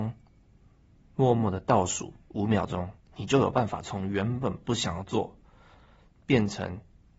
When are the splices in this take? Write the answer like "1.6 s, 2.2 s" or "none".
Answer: 2.2 s, 3.0 s